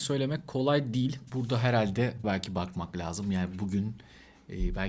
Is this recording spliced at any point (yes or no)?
yes